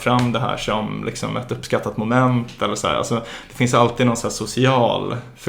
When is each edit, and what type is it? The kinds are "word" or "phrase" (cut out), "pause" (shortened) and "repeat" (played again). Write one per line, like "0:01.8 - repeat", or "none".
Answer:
none